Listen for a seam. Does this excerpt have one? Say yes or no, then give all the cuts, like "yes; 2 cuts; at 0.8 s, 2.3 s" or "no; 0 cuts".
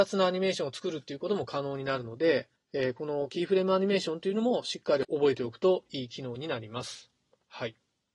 yes; 1 cut; at 2.6 s